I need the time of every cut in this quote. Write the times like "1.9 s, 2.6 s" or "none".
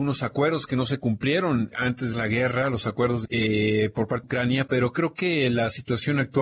1.7 s, 2.1 s, 3.2 s, 4.2 s, 4.7 s